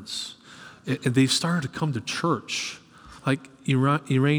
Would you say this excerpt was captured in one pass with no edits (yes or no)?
no